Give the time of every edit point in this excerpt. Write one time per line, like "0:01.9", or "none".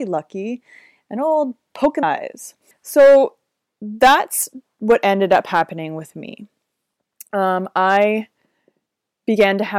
0:02.0
0:02.7